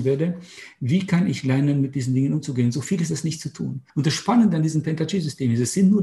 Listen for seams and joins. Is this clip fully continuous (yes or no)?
no